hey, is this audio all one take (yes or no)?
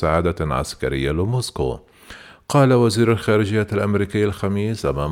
yes